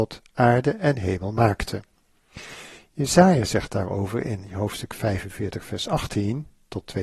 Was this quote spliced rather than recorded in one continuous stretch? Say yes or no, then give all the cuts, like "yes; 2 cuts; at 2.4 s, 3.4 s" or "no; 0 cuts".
no; 0 cuts